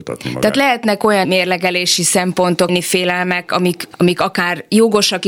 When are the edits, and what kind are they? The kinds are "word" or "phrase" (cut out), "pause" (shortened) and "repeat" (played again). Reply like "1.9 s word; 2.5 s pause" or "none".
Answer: 1.2 s word; 2.7 s word; 3.9 s word